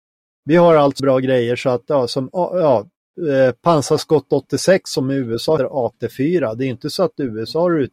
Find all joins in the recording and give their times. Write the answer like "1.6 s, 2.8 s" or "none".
1.0 s, 5.6 s